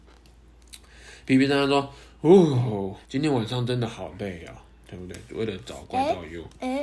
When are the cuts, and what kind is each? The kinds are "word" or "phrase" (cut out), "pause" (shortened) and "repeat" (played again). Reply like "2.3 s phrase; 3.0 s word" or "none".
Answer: 3.0 s pause